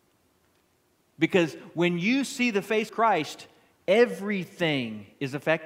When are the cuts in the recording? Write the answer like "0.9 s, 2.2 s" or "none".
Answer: 2.9 s